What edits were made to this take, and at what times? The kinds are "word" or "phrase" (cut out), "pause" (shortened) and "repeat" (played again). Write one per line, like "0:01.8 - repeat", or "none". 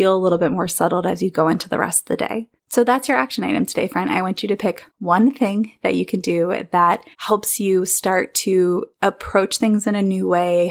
0:02.6 - pause
0:04.9 - pause
0:07.1 - pause
0:08.9 - pause